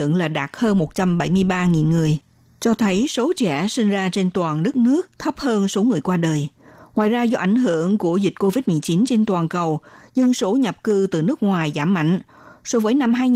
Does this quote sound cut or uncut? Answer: uncut